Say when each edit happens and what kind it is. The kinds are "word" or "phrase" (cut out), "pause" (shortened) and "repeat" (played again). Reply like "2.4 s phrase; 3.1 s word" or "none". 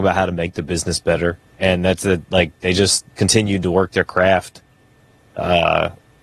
1.5 s pause; 3.1 s pause